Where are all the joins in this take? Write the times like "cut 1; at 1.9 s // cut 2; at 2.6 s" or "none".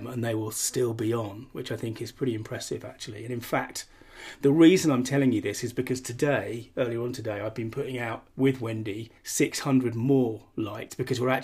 cut 1; at 8.3 s // cut 2; at 9.2 s